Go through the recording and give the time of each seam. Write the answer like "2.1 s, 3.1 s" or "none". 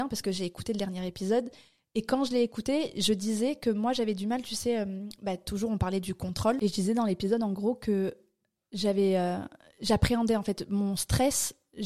none